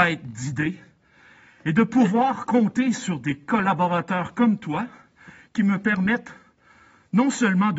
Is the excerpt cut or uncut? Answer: uncut